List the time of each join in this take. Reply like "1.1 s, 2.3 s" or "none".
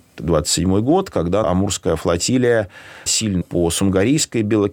1.4 s, 3.1 s, 3.4 s